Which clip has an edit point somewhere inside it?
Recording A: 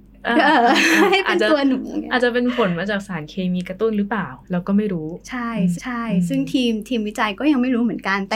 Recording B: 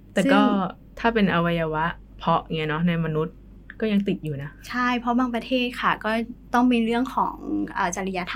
A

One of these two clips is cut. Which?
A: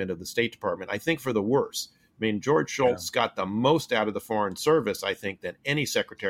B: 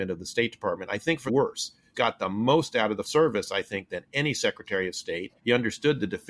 B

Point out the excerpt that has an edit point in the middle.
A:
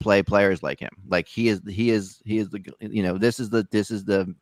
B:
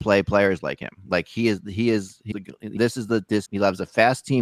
B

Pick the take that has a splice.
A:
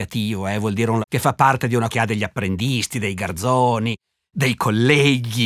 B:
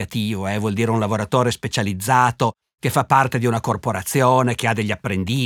A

